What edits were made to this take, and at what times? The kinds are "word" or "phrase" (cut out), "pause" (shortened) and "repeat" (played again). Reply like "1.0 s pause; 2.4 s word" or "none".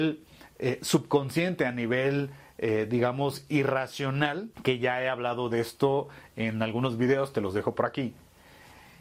4.5 s pause